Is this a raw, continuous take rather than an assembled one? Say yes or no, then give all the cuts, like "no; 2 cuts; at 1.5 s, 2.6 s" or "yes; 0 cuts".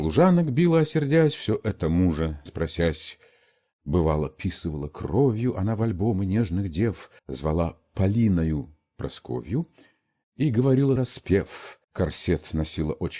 no; 4 cuts; at 2.5 s, 7.2 s, 11.0 s, 11.8 s